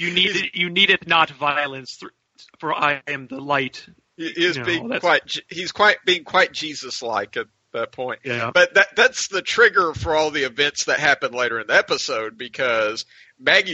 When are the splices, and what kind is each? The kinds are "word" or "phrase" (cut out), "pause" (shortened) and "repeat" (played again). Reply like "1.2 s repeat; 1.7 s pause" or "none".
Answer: none